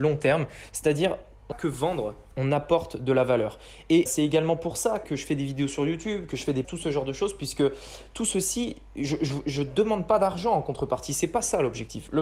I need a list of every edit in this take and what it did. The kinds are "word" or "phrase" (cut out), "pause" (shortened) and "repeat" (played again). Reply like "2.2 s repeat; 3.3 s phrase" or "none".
1.5 s phrase; 4.1 s word; 6.6 s word